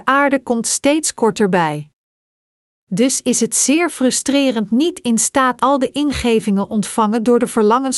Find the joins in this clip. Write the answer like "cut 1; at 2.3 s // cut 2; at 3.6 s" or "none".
cut 1; at 5.6 s